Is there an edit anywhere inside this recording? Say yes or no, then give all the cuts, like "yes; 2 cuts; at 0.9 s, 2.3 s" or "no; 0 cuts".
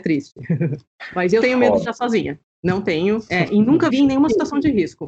yes; 4 cuts; at 1.4 s, 1.8 s, 2.5 s, 3.9 s